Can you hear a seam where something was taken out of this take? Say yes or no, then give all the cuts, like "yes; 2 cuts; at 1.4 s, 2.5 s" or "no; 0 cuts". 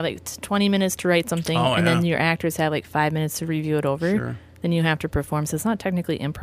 no; 0 cuts